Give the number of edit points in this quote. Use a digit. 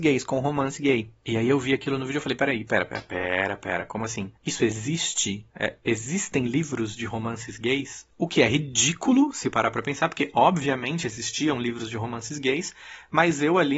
3